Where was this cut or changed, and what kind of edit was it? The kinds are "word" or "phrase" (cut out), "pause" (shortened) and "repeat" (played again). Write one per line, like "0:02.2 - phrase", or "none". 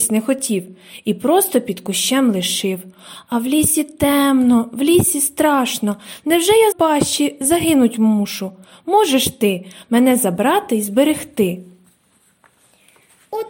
0:06.7 - phrase